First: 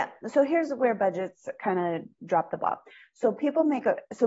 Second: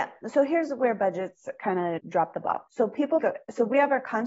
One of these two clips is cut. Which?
second; 3 cuts; at 2.0 s, 2.7 s, 3.2 s

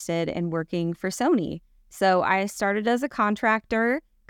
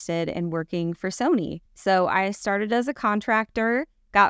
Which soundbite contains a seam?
second; 1 cut; at 1.7 s

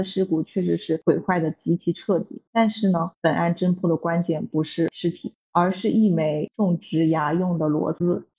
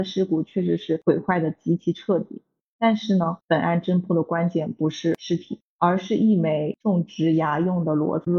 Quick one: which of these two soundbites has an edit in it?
first; 1 cut; at 2.5 s

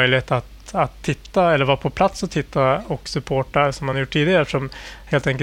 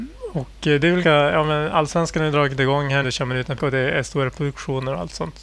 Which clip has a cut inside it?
second; 3 cuts; at 1.0 s, 3.0 s, 3.6 s

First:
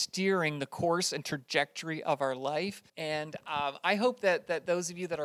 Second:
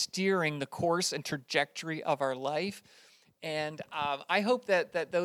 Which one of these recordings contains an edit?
first; 1 cut; at 2.9 s

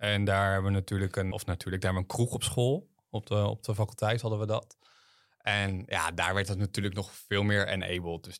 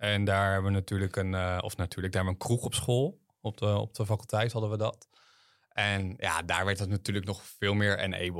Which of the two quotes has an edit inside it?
first; 1 cut; at 1.3 s

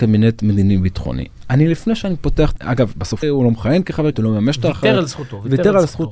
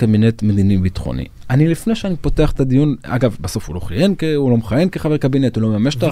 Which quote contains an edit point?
first; 3 cuts; at 2.6 s, 3.2 s, 4.1 s

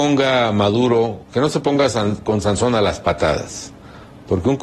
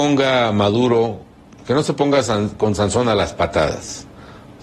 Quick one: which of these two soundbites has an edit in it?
first; 1 cut; at 1.3 s

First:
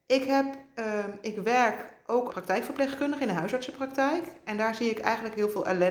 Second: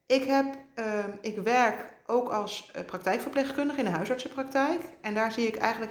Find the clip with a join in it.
first; 1 cut; at 2.3 s

